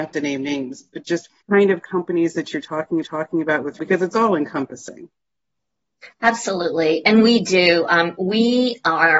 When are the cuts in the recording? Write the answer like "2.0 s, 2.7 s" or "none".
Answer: 1.4 s, 3.0 s, 3.8 s, 6.1 s